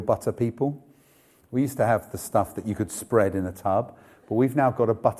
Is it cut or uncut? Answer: uncut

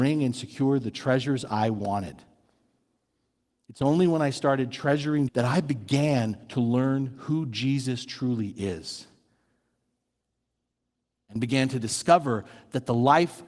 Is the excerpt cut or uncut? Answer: cut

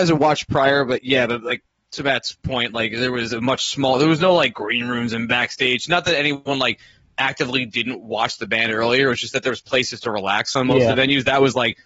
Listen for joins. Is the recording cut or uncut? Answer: uncut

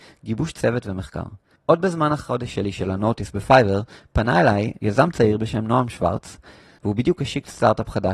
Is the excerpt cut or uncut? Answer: uncut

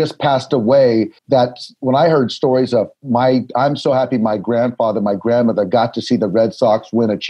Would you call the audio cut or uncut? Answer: cut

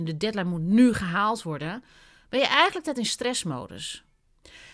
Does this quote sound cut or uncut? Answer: cut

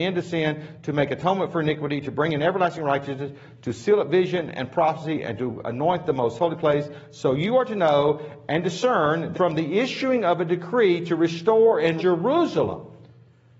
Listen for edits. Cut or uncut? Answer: cut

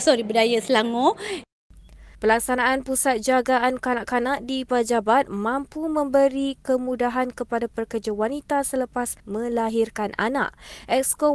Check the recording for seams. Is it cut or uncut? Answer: cut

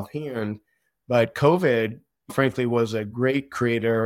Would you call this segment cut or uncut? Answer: cut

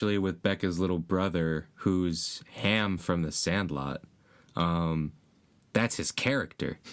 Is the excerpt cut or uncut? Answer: uncut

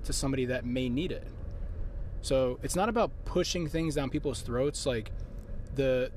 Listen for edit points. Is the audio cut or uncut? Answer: uncut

